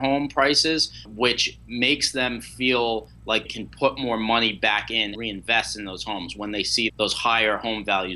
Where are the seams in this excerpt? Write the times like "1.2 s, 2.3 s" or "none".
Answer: 1.1 s, 3.5 s, 5.2 s, 6.9 s